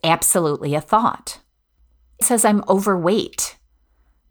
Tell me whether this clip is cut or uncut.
cut